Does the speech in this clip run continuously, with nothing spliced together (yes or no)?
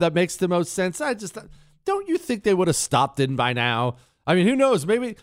yes